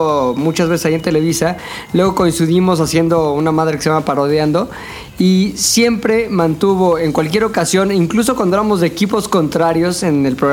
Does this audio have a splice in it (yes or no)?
no